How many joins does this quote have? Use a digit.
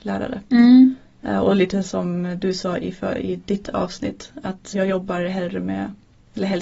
1